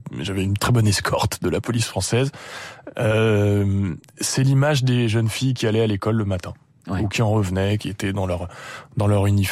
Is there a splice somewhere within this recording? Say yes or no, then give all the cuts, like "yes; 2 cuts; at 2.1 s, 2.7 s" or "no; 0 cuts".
no; 0 cuts